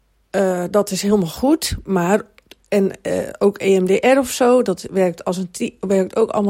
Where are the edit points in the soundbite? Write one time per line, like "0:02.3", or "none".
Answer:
none